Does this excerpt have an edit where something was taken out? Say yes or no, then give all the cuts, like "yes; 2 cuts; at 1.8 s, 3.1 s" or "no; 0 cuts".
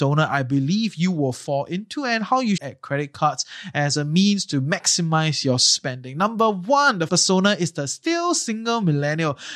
yes; 2 cuts; at 2.6 s, 7.1 s